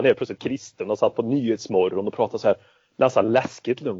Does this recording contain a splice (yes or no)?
no